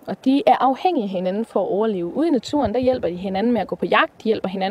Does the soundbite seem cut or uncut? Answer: uncut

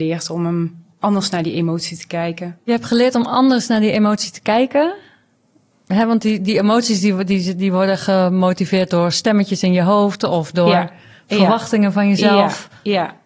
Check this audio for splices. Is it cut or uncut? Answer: cut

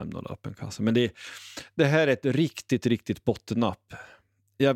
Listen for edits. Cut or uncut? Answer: uncut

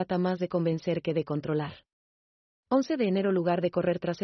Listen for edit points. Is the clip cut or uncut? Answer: uncut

